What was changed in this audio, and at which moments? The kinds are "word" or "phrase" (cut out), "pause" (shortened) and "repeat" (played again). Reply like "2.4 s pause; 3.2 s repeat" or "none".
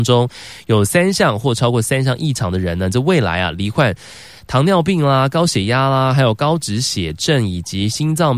none